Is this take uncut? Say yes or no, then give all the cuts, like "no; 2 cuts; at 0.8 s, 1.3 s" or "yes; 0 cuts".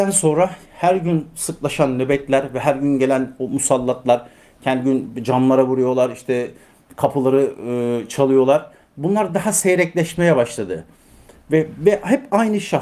yes; 0 cuts